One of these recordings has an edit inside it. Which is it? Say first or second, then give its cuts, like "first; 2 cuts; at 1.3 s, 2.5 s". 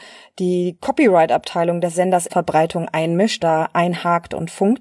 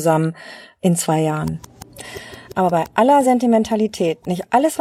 first; 2 cuts; at 2.3 s, 3.4 s